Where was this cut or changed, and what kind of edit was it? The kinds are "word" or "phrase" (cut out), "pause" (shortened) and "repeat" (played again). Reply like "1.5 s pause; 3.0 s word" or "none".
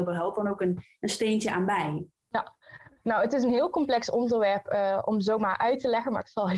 2.2 s pause